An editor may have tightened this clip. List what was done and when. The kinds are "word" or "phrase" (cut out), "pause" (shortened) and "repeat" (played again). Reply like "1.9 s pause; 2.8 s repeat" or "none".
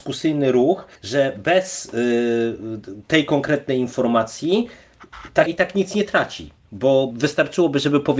1.0 s pause; 5.5 s word; 7.1 s word